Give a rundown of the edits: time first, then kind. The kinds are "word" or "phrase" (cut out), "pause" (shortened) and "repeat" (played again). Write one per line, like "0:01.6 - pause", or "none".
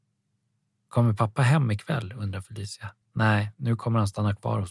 0:03.0 - pause